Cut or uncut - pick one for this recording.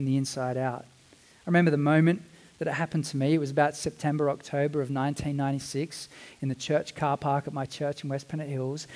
uncut